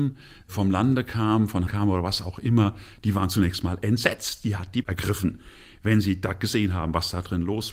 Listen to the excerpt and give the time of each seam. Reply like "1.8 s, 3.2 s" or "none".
1.7 s, 4.8 s